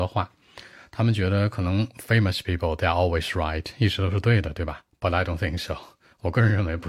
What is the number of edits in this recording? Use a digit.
0